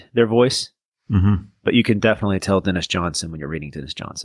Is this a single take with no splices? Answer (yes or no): yes